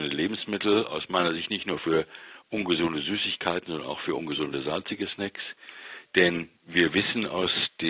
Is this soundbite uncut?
yes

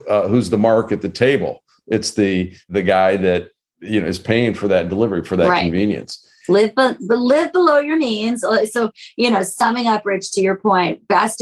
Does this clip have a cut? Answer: no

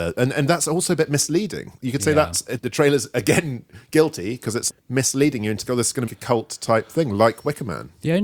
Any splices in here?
yes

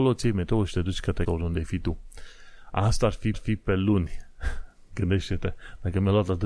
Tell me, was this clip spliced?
yes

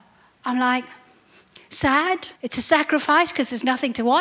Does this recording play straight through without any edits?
no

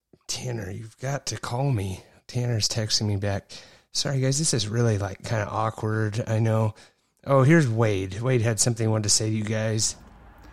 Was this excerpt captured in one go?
yes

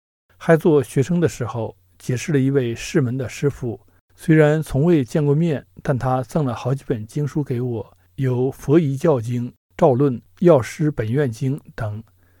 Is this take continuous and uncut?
no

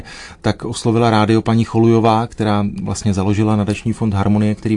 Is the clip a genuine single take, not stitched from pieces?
yes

